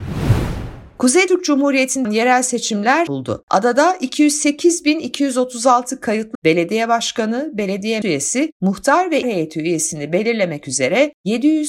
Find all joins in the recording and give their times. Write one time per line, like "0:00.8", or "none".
0:01.3
0:02.0
0:03.1
0:06.3
0:08.0
0:09.2